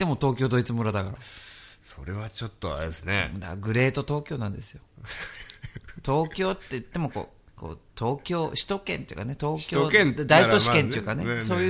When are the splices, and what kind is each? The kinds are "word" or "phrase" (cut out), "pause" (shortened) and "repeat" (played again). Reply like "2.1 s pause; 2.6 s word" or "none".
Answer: 7.5 s pause